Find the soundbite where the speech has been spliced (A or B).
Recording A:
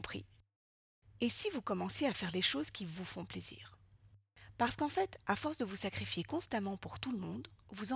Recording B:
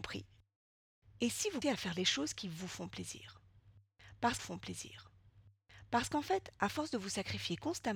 B